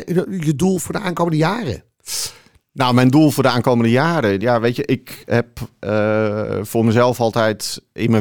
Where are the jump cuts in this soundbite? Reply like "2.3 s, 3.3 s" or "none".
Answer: none